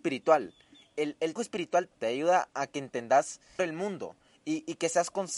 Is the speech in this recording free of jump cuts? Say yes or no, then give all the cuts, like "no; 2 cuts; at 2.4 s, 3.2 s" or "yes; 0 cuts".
no; 3 cuts; at 1.4 s, 1.9 s, 3.6 s